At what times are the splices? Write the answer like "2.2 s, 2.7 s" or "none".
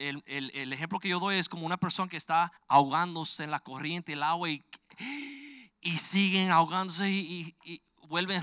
2.6 s, 5.7 s

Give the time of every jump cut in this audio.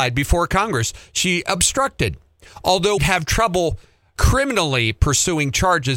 3.0 s, 4.2 s

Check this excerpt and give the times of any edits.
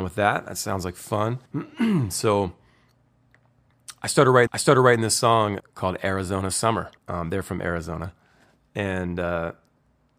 1.5 s, 4.5 s, 5.6 s, 7.0 s

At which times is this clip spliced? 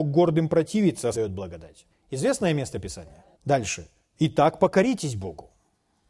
1.1 s, 1.9 s, 3.3 s

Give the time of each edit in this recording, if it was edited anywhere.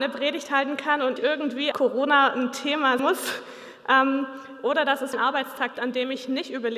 1.2 s, 1.7 s, 3.0 s, 5.1 s, 5.7 s

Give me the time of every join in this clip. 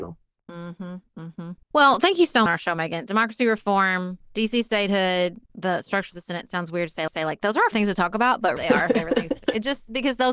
1.6 s, 2.5 s, 4.3 s, 5.5 s, 6.1 s, 7.1 s, 7.7 s, 8.6 s

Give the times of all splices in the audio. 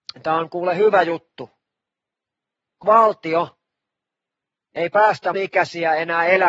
2.8 s, 5.3 s

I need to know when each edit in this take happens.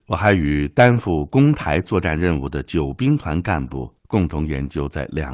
4.0 s

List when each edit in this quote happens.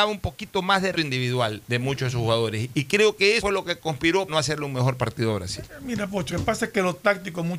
0.9 s, 3.4 s, 4.3 s, 6.3 s

